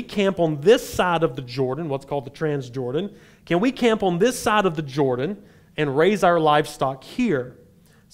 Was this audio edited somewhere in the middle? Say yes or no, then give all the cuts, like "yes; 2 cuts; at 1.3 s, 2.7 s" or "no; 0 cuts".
no; 0 cuts